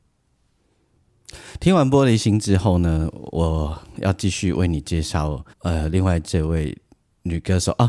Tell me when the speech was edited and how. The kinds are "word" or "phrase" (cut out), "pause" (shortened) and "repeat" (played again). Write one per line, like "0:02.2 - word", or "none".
0:05.5 - pause